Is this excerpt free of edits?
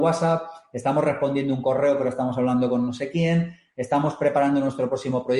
yes; 0 cuts

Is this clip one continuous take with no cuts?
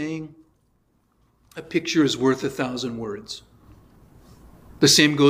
yes; 0 cuts

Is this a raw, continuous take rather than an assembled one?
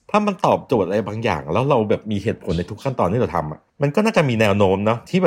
no; 1 cut; at 3.7 s

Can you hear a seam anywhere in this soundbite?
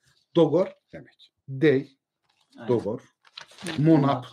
yes; 2 cuts; at 0.9 s, 1.4 s

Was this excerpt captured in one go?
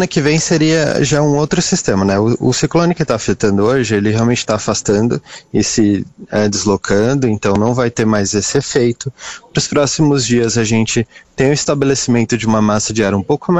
yes; 0 cuts

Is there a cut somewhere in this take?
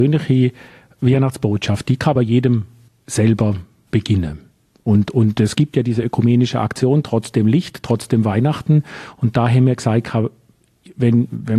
no; 0 cuts

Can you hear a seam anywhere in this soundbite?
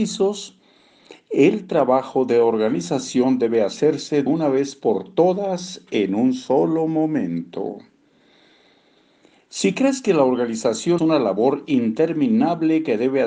yes; 2 cuts; at 4.3 s, 11.0 s

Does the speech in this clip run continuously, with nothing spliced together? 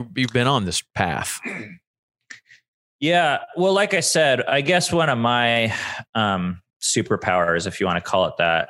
no; 1 cut; at 6.7 s

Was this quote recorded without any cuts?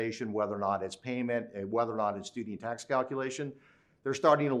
yes; 0 cuts

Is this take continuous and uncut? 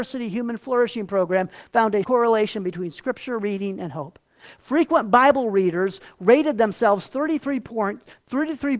no; 1 cut; at 2.0 s

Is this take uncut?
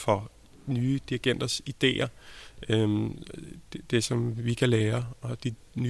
yes; 0 cuts

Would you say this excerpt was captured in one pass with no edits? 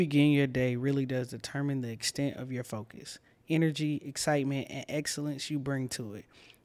yes; 0 cuts

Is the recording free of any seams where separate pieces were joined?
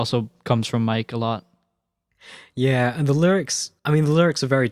no; 1 cut; at 3.8 s

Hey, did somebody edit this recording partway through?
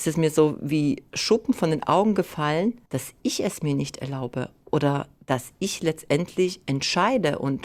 yes; 1 cut; at 2.9 s

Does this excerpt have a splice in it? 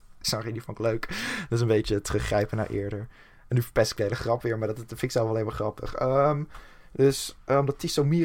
no; 0 cuts

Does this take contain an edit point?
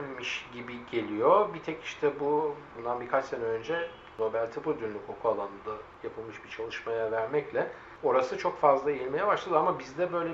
no; 0 cuts

